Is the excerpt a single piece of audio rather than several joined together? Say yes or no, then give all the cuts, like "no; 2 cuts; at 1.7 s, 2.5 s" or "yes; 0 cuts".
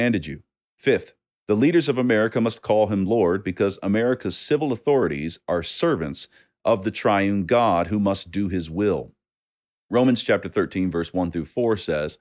yes; 0 cuts